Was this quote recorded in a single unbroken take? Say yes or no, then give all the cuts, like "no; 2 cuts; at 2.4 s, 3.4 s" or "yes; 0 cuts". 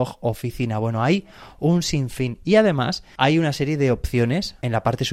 yes; 0 cuts